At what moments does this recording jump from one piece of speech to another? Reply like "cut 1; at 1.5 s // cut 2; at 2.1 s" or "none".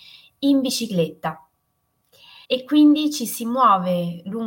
cut 1; at 2.4 s